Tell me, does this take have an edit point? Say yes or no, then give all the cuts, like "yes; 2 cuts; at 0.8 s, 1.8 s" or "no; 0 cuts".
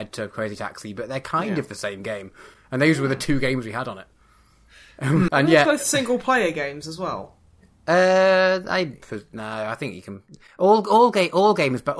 yes; 1 cut; at 5.3 s